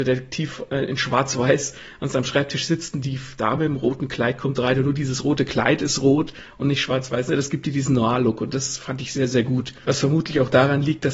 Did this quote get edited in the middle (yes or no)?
no